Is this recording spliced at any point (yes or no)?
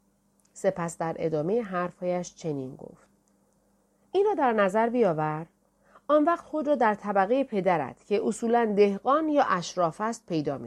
no